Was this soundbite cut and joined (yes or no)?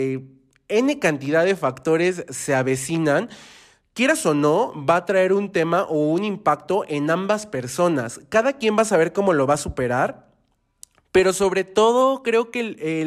no